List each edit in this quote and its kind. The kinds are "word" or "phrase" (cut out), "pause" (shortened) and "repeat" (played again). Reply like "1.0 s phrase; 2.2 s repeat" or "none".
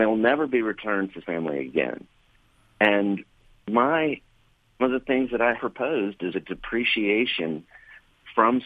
1.2 s word; 4.8 s word; 5.6 s word; 6.3 s word

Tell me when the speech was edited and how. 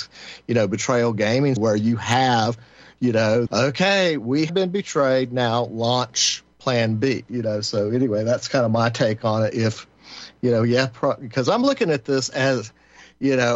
1.6 s word; 3.5 s word; 4.5 s word

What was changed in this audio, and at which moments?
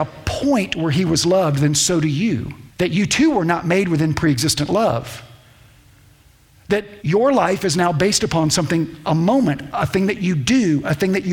2.7 s pause; 7.0 s pause

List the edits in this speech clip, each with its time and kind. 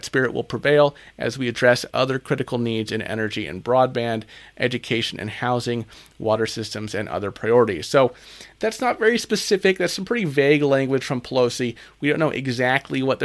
none

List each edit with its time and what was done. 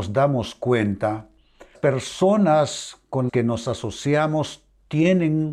1.7 s word; 3.3 s word

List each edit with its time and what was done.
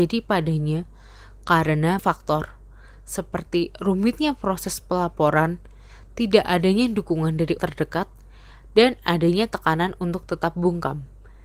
2.0 s word; 7.6 s word

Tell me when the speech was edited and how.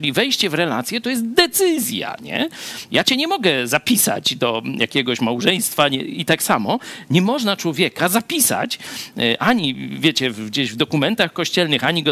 none

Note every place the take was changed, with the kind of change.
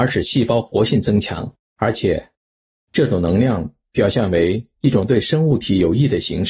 1.6 s pause

